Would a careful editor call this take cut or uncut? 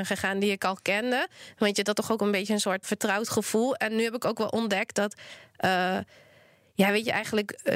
cut